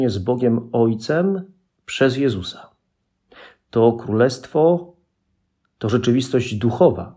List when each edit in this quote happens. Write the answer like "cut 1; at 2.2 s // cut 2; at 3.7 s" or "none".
none